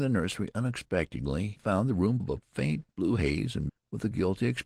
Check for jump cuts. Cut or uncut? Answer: cut